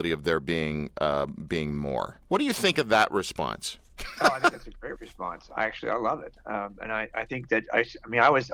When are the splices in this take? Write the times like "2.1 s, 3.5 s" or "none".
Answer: 2.2 s, 3.9 s

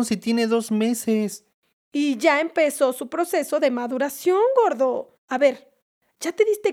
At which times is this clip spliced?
5.2 s

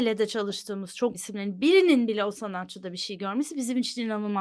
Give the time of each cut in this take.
1.1 s

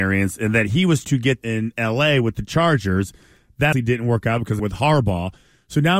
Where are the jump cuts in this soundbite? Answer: 1.0 s, 1.4 s, 3.7 s, 4.6 s

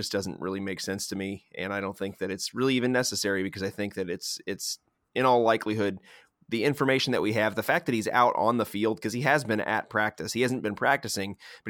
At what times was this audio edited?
none

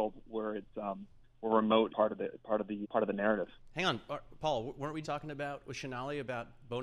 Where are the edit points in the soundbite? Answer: 1.9 s, 2.8 s, 5.0 s

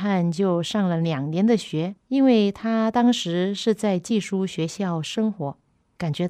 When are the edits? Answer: 2.0 s

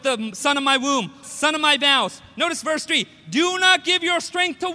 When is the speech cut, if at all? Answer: 1.2 s

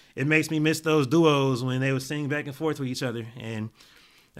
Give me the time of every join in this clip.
none

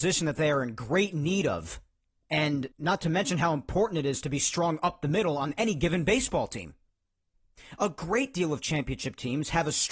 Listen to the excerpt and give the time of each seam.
2.7 s

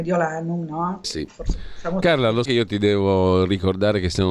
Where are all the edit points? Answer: 1.0 s, 2.5 s

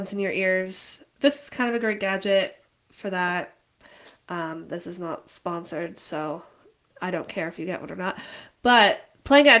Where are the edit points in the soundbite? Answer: none

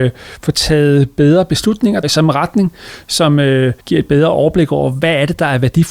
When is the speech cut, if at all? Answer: 2.0 s, 3.8 s

